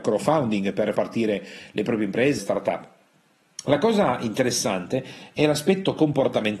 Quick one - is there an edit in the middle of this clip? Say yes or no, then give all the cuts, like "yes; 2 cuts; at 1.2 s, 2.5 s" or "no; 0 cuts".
yes; 2 cuts; at 0.9 s, 2.4 s